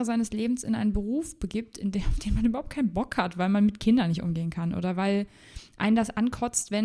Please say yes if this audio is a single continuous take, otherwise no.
yes